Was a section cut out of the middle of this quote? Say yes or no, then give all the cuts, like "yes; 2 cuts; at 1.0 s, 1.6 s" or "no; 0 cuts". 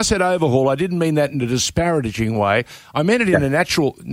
no; 0 cuts